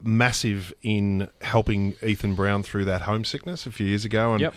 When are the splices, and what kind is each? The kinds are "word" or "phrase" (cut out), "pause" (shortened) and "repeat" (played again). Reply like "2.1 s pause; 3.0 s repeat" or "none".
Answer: none